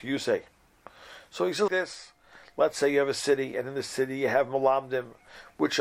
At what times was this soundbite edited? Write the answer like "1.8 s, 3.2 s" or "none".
1.7 s